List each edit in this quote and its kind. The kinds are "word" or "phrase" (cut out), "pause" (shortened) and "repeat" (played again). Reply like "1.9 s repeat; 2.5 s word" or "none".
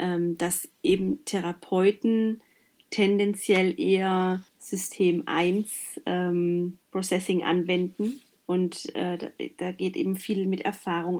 4.5 s pause; 6.8 s pause